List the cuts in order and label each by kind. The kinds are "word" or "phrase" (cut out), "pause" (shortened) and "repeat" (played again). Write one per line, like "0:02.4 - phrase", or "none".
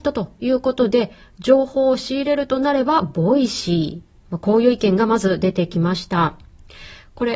none